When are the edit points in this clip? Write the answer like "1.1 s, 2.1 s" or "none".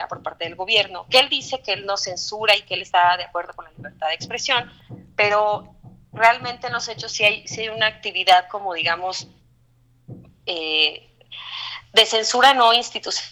none